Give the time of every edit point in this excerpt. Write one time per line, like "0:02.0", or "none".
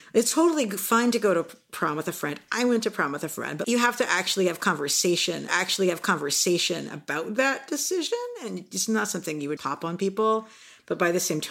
0:03.6
0:05.5
0:09.6